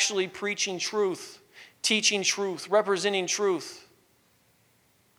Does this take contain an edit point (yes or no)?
no